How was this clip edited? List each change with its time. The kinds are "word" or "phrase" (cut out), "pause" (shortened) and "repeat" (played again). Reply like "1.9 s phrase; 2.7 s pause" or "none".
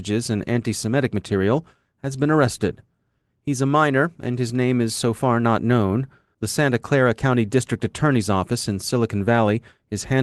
none